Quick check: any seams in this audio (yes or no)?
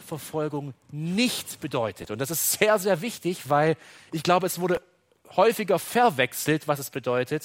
no